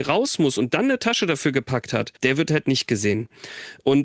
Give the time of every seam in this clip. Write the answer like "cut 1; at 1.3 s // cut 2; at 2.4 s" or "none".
cut 1; at 2.2 s